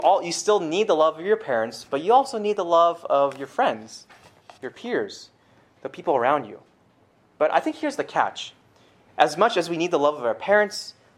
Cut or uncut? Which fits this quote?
uncut